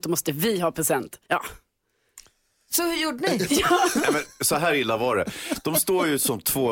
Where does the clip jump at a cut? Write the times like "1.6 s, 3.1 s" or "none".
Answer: 1.2 s